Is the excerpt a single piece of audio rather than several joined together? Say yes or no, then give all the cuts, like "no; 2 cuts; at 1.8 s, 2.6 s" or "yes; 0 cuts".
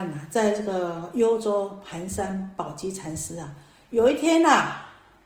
yes; 0 cuts